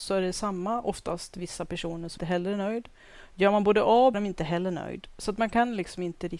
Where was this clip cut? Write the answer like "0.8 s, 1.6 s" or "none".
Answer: 2.2 s, 4.1 s